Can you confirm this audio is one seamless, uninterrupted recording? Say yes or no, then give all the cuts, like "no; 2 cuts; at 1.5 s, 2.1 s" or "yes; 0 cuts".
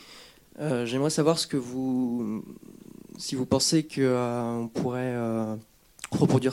yes; 0 cuts